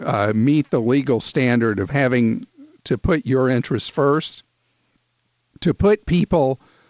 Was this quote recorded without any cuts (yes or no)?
yes